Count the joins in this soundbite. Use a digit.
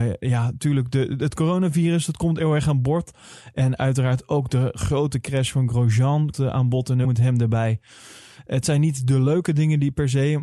2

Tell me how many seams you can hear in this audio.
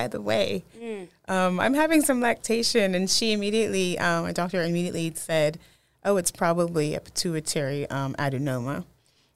0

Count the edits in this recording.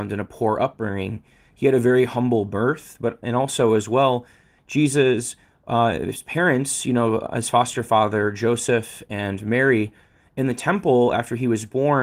0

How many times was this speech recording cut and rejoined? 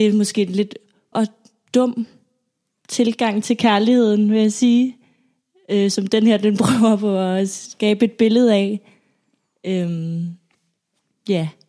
1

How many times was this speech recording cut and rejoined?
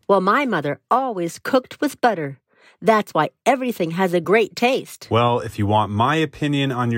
0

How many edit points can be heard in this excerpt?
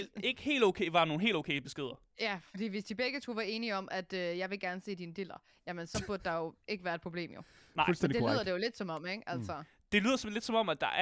0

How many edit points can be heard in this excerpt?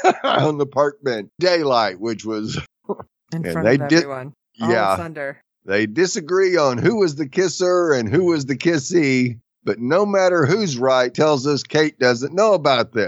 3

